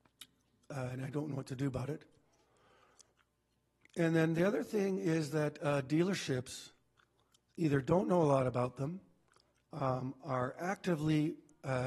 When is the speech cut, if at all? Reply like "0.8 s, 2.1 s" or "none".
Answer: none